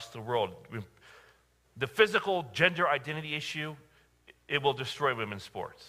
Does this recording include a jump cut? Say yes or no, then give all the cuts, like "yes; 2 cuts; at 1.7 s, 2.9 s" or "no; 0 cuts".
no; 0 cuts